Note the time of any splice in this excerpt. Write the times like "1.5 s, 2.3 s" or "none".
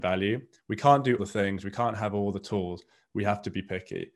1.2 s

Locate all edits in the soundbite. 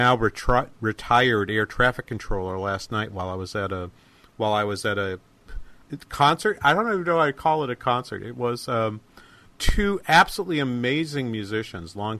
none

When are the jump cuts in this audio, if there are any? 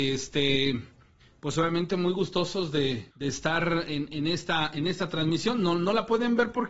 3.1 s

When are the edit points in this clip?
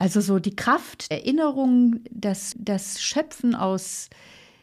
1.1 s, 2.5 s

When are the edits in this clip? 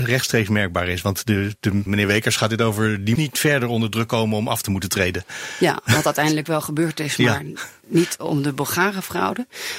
1.9 s, 3.2 s

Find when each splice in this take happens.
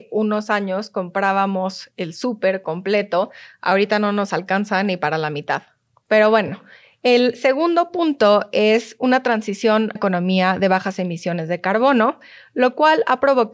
10.0 s

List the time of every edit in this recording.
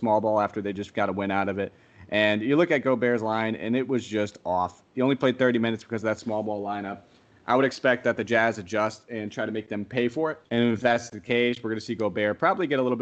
10.4 s

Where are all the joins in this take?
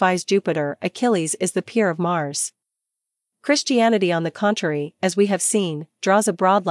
none

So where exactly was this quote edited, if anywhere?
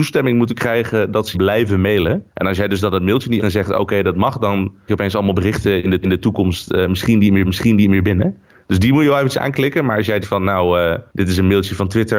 1.3 s, 2.3 s, 3.4 s, 4.9 s, 6.0 s, 7.4 s, 10.2 s, 11.1 s

